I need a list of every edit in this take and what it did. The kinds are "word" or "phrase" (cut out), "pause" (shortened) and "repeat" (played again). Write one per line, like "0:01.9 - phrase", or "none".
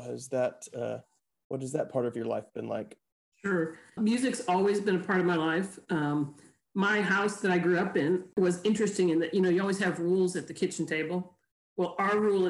0:04.0 - word